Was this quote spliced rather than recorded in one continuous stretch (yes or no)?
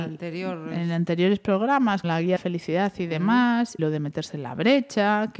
yes